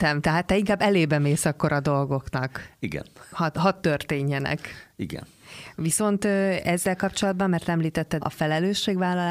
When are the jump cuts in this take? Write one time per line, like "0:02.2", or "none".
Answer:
0:08.2